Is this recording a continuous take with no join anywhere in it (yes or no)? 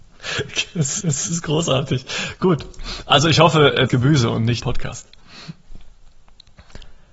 no